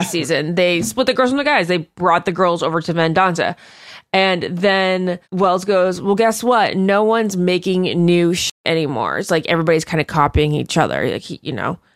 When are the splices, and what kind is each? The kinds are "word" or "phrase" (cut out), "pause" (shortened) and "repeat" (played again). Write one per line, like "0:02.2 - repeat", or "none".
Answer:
0:05.2 - pause